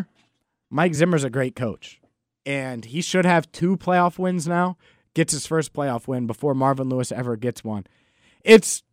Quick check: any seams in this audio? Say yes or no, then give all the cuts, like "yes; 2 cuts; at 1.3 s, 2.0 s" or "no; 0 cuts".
no; 0 cuts